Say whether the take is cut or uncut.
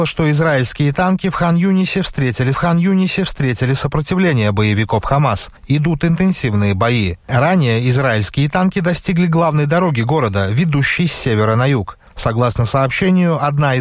cut